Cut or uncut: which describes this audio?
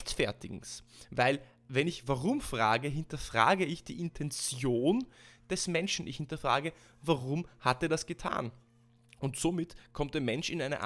uncut